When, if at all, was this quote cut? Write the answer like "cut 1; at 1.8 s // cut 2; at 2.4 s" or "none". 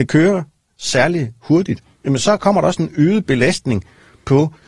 none